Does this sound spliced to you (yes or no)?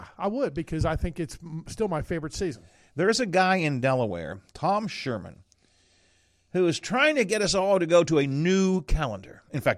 no